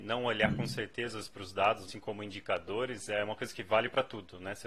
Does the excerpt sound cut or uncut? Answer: cut